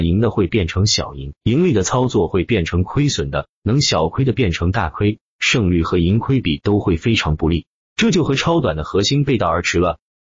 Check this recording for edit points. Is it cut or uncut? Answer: uncut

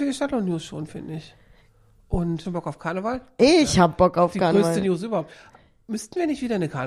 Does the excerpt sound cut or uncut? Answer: cut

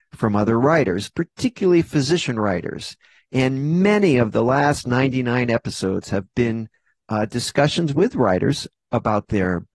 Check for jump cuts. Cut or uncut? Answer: uncut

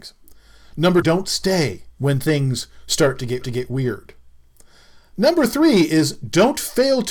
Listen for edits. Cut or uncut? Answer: cut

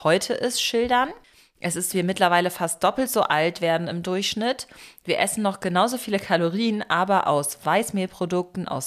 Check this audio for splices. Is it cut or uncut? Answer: cut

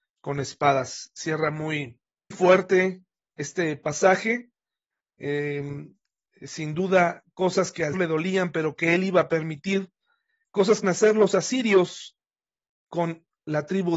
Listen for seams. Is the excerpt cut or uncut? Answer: cut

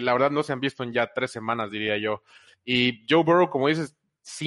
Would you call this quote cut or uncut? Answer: uncut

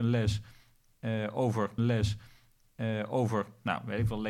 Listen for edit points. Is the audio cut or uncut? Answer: cut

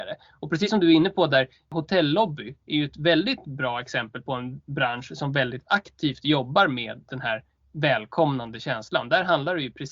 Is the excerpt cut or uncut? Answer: uncut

